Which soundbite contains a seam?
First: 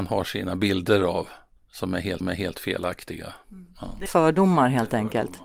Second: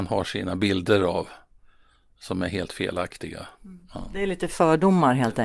first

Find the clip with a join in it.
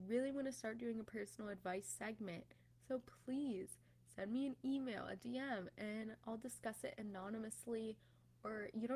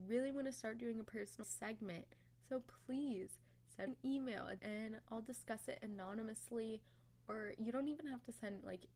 second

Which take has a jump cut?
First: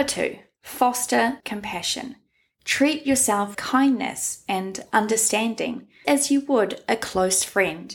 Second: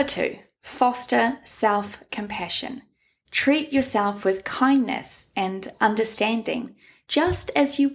first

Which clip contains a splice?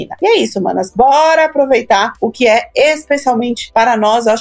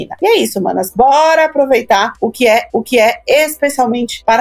second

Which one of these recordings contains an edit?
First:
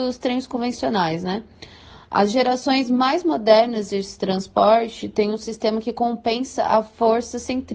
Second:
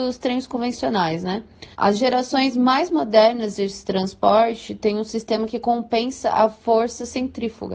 second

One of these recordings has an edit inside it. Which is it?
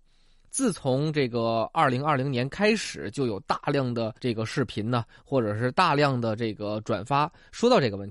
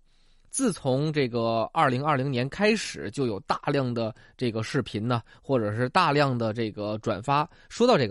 first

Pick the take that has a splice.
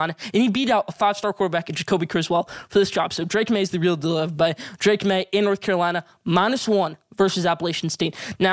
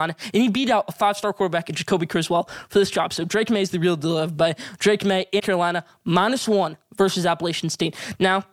second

